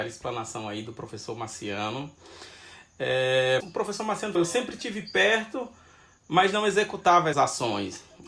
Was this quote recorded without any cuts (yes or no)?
no